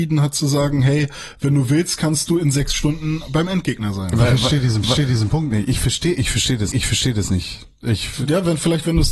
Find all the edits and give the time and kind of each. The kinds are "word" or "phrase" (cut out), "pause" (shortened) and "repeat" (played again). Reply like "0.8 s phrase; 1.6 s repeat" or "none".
4.8 s repeat; 6.7 s repeat

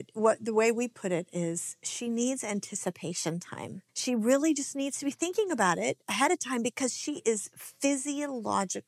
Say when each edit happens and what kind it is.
3.9 s pause

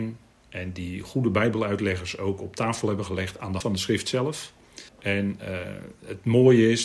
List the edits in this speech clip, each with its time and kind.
3.6 s word; 4.9 s pause

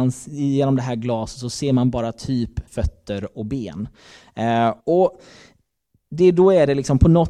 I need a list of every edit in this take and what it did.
2.7 s pause; 4.8 s pause

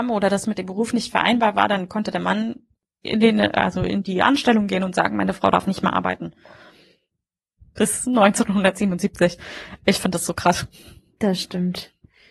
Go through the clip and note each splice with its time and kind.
none

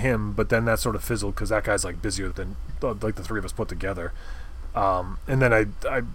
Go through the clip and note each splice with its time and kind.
2.3 s word

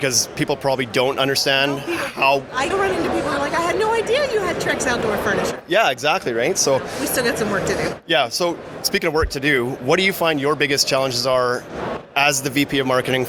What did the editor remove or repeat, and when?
2.7 s word

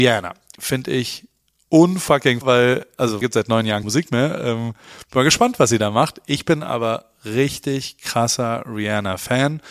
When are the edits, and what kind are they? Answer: 2.4 s word; 3.2 s phrase; 3.8 s word

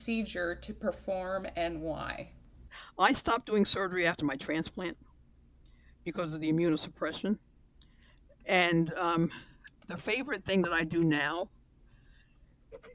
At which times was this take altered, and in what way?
none

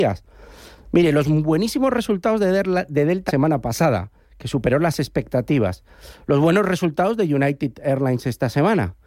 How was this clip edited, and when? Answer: 3.3 s phrase

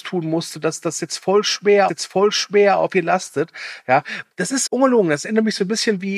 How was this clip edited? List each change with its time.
1.9 s repeat; 4.3 s pause; 4.7 s word

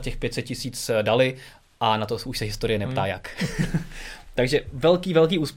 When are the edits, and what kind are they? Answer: none

